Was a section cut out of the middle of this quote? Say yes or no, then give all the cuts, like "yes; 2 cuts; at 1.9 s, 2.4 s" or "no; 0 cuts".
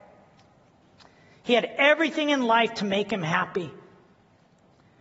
no; 0 cuts